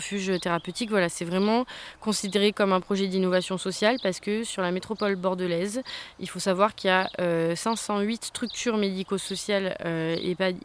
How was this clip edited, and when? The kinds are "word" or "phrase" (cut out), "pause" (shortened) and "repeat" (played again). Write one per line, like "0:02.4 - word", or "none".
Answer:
none